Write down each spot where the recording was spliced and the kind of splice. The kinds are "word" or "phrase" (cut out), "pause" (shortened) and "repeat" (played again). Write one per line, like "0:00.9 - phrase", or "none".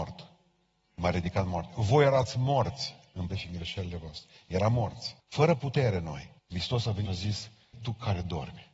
0:03.3 - word
0:05.2 - pause
0:06.4 - pause
0:07.1 - word
0:07.7 - word